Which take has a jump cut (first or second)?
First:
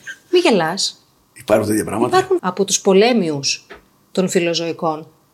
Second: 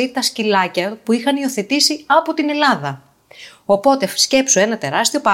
first